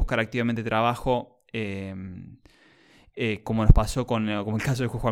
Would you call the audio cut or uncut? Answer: uncut